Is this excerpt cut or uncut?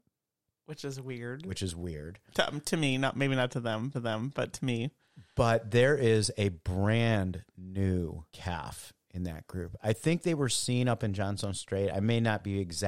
cut